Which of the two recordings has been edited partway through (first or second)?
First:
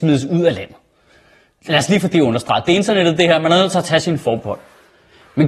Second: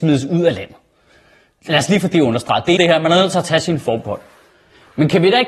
second